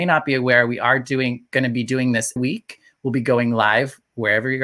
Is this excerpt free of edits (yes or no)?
no